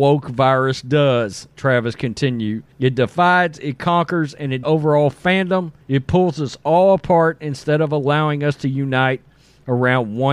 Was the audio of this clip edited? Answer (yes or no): yes